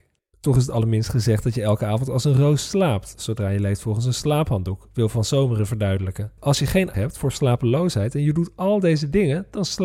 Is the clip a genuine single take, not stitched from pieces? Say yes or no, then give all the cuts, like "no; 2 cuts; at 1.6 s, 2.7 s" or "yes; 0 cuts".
no; 1 cut; at 6.9 s